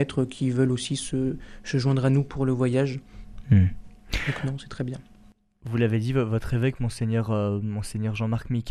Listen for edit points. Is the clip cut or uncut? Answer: uncut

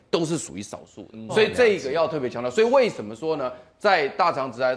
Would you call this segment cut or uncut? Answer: cut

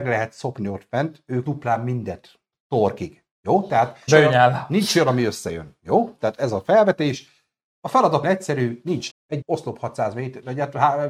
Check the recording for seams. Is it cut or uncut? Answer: cut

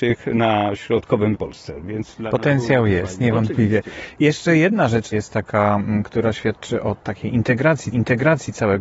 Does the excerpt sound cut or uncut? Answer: cut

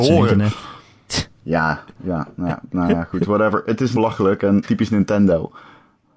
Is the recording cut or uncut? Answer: cut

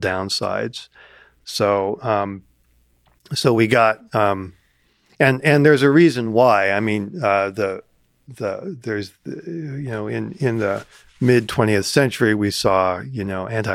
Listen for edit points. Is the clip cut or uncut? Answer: uncut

